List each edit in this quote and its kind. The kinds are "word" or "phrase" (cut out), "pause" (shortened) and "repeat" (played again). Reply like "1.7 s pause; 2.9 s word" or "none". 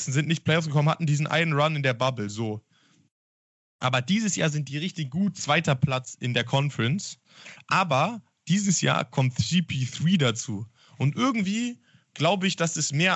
none